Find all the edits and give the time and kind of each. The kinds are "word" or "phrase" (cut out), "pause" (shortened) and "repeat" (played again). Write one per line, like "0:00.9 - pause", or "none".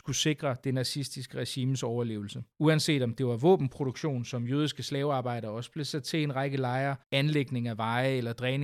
0:02.5 - pause
0:07.0 - pause

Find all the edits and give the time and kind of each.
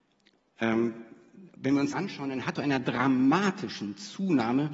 0:01.6 - word
0:01.9 - word
0:02.6 - word

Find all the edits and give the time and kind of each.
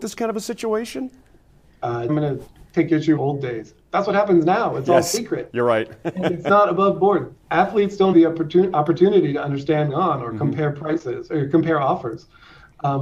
0:02.1 - phrase
0:02.5 - pause
0:03.2 - phrase
0:08.1 - word
0:09.9 - phrase

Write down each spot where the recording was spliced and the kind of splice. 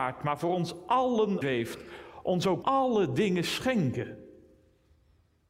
0:01.4 - word
0:02.6 - phrase

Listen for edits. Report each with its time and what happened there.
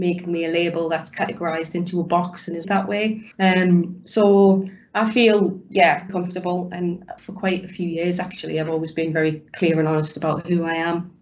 0:02.6 - phrase
0:03.3 - pause
0:06.1 - word
0:07.2 - word
0:09.5 - pause

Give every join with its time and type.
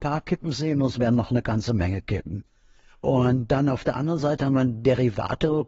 none

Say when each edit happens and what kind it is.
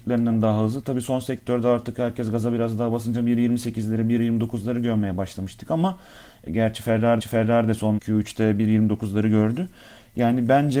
0:06.5 - word
0:07.2 - repeat
0:08.0 - word

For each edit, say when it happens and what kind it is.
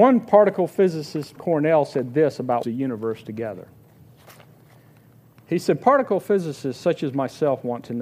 0:01.4 - word
0:02.6 - phrase

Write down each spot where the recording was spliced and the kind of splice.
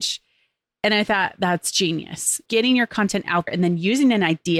0:02.5 - word
0:03.5 - word

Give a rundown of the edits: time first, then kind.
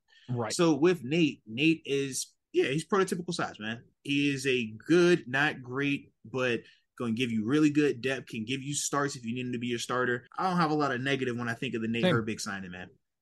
0:02.4 - pause
0:03.9 - pause
0:10.3 - pause

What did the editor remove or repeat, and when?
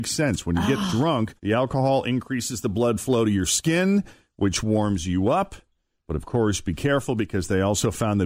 0:01.4 - pause

